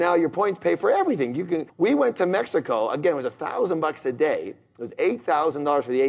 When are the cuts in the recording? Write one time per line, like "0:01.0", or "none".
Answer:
0:01.7

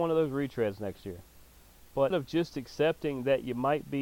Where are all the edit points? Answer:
0:02.1

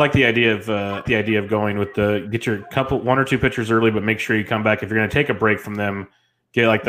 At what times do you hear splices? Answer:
0:01.1

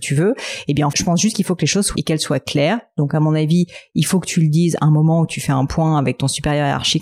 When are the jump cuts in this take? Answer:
0:00.9
0:02.0

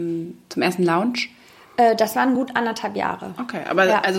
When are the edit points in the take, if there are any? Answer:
none

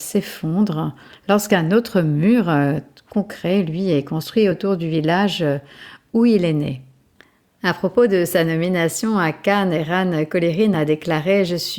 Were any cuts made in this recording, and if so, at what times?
none

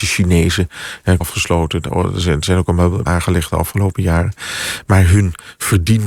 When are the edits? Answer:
0:01.2
0:03.1

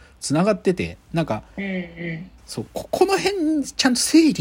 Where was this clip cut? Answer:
0:02.4

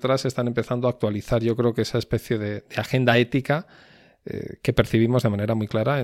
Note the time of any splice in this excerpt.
none

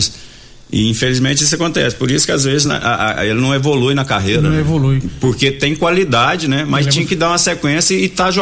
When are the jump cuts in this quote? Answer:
none

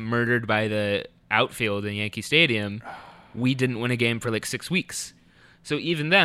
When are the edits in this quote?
none

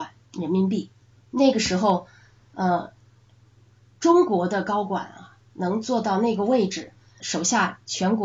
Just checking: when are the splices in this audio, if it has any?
0:07.2

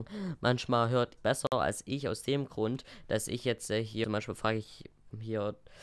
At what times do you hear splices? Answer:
0:01.2
0:04.0

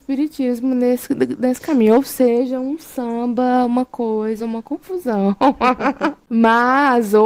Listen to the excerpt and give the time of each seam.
none

